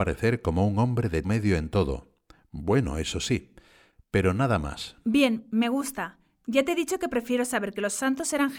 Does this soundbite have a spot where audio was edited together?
yes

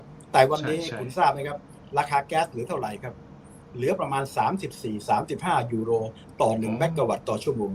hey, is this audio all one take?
yes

